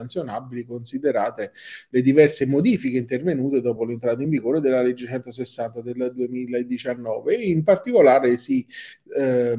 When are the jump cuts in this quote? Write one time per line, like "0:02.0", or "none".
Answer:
none